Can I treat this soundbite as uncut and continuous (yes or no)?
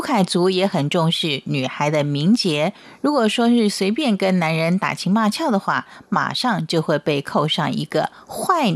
yes